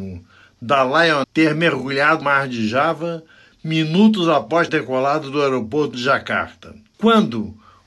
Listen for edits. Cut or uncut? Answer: cut